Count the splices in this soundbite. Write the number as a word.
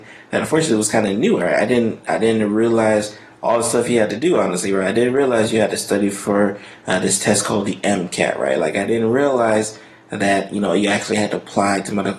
zero